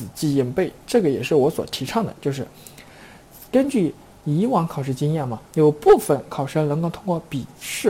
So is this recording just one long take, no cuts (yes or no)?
no